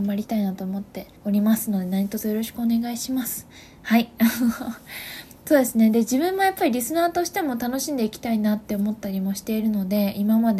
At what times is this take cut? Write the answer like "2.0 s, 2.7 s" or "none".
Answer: 1.2 s